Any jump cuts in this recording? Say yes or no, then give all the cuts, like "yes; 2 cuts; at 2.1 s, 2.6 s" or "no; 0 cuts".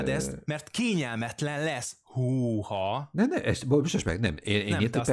no; 0 cuts